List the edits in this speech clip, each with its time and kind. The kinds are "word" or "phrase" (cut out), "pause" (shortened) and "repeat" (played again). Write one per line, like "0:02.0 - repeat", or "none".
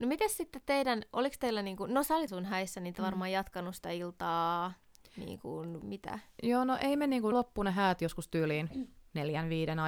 0:02.3 - word
0:02.9 - word
0:05.8 - word
0:07.3 - word

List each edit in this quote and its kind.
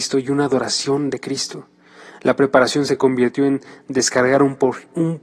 none

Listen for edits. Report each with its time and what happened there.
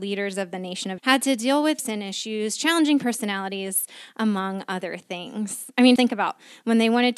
0:01.0 - word
0:01.8 - word
0:06.0 - word

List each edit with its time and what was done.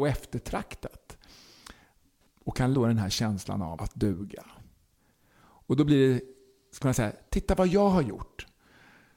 0:02.7 - word
0:03.8 - word
0:06.8 - word
0:07.3 - word

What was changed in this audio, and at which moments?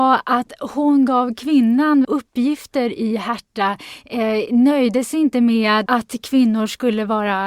0:02.0 - phrase
0:05.9 - word

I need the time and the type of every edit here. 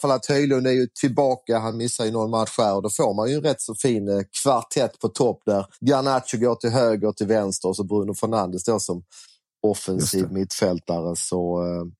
0:05.7 - pause
0:07.0 - word

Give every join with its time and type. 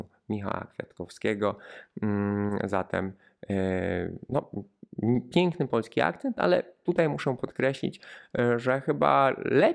none

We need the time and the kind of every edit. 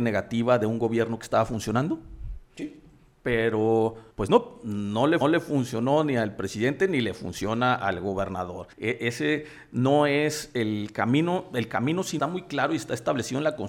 0:04.1 - pause
0:05.2 - repeat
0:08.7 - pause
0:12.2 - phrase

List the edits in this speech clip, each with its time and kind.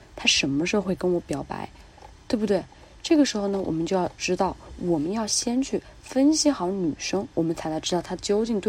none

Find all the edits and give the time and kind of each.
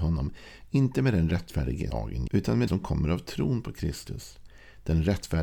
0:01.9 - word
0:02.3 - word
0:02.7 - word

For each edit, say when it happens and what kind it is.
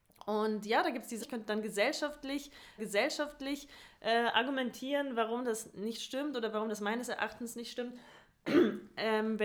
0:01.2 - word
0:02.8 - repeat

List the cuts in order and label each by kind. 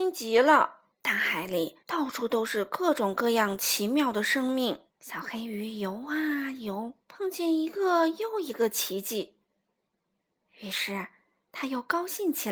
0:00.9 - pause
0:01.8 - pause
0:04.9 - pause
0:07.0 - pause

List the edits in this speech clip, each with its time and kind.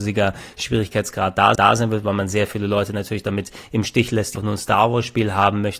0:01.6 - repeat
0:04.4 - word

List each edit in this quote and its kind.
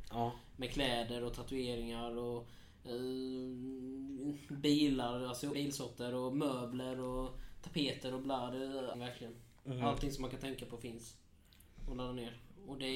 0:05.5 - word
0:08.9 - word

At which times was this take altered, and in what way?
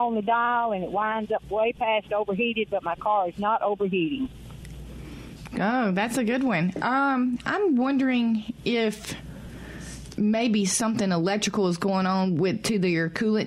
none

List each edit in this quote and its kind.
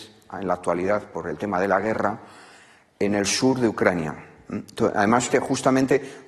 0:05.3 - word

